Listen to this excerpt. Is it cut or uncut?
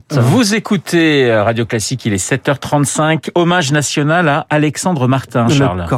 uncut